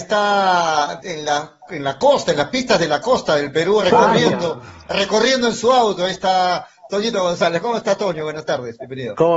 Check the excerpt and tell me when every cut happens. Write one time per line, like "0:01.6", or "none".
0:01.0
0:03.8